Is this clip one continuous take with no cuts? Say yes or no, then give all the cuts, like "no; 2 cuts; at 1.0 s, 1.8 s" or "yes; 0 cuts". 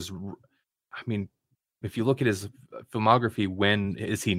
yes; 0 cuts